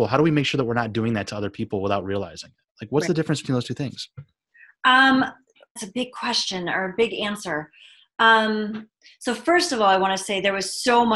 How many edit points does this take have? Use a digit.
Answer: 1